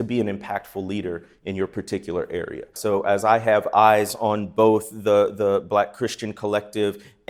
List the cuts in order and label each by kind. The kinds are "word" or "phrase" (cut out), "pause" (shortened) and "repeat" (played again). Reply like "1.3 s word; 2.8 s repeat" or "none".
none